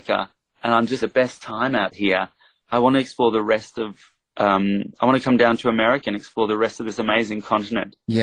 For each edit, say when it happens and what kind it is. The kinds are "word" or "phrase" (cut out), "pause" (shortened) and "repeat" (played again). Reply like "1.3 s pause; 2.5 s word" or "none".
1.0 s word